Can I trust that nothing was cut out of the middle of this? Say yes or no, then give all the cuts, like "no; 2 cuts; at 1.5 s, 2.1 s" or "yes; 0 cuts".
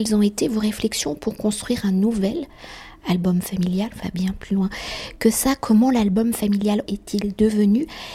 no; 2 cuts; at 4.0 s, 6.9 s